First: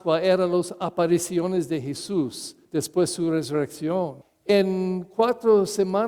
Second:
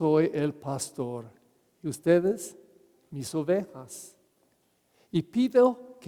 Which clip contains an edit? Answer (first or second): first